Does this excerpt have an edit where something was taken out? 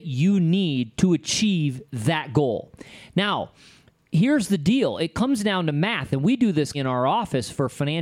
yes; 1 cut; at 6.7 s

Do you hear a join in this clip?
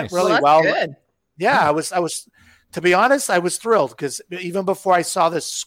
no; 0 cuts

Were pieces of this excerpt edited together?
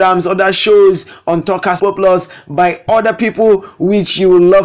yes; 1 cut; at 1.8 s

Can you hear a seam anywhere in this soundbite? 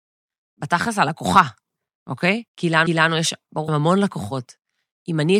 yes; 3 cuts; at 2.5 s, 2.9 s, 3.7 s

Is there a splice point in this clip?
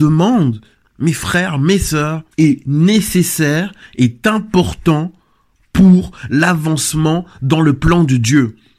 yes; 1 cut; at 2.3 s

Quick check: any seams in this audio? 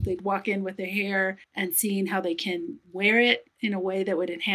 yes; 1 cut; at 1.4 s

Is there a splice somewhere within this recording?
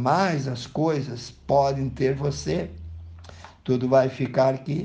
no; 0 cuts

